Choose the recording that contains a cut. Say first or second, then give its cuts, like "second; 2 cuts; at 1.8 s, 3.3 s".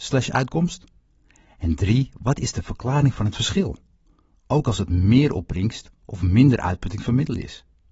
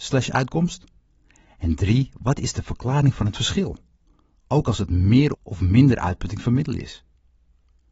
second; 1 cut; at 5.3 s